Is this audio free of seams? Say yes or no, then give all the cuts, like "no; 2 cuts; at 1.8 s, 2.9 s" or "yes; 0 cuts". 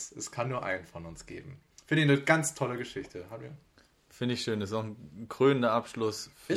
yes; 0 cuts